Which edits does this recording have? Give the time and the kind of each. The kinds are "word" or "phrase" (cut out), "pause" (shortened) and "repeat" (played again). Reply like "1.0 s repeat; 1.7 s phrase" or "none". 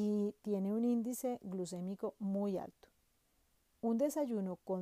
none